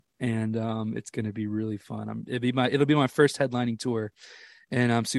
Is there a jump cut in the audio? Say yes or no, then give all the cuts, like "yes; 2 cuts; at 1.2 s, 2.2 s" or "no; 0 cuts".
no; 0 cuts